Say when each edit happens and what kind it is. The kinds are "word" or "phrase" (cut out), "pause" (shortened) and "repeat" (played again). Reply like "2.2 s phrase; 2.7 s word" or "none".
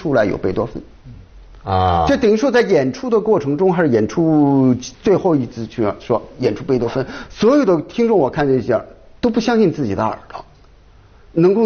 4.9 s pause